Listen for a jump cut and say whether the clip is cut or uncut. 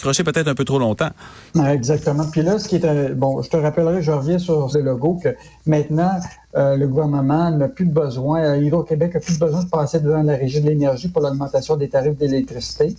cut